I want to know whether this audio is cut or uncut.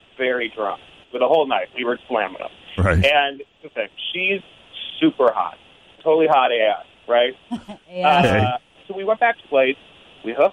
cut